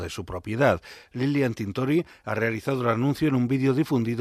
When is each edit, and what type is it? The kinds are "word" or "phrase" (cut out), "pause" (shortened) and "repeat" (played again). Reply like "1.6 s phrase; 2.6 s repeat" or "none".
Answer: none